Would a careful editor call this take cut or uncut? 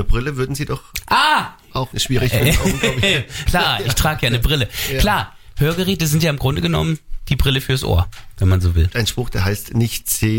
cut